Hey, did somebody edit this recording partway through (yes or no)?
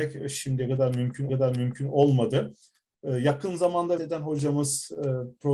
yes